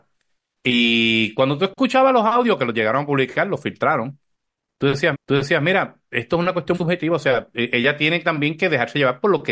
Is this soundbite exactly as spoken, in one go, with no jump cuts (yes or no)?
no